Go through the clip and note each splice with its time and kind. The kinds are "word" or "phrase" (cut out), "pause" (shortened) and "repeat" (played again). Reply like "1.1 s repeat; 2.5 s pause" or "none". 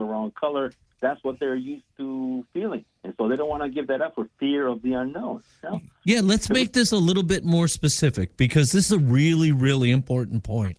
8.9 s word